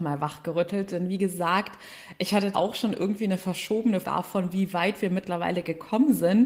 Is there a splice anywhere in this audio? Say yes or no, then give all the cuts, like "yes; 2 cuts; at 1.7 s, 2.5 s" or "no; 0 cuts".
yes; 2 cuts; at 2.5 s, 4.0 s